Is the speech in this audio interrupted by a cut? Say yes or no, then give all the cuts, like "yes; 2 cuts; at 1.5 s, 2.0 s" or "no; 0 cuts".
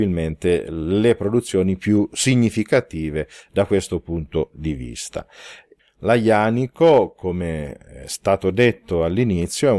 no; 0 cuts